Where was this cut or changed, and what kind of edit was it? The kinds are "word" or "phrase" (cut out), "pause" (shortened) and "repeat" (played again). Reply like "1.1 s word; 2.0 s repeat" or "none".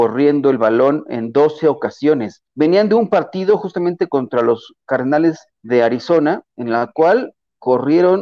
2.5 s pause; 4.8 s word; 5.5 s pause